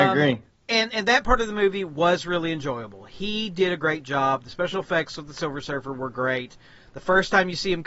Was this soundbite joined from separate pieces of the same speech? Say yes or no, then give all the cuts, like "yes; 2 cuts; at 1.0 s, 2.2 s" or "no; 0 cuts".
no; 0 cuts